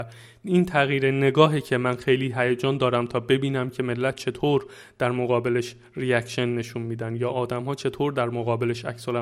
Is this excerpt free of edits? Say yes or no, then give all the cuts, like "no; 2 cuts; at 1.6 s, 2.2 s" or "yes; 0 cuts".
yes; 0 cuts